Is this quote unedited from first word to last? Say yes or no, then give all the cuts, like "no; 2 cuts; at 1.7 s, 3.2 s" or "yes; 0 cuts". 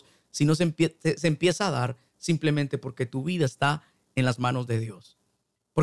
yes; 0 cuts